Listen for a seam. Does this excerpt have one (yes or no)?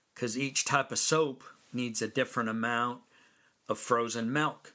no